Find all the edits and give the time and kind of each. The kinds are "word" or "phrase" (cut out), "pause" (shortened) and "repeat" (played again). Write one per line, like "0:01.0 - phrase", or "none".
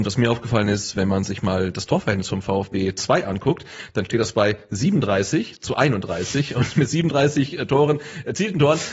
none